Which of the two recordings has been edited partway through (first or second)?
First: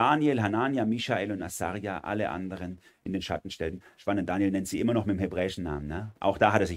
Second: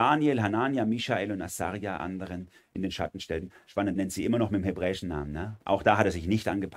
second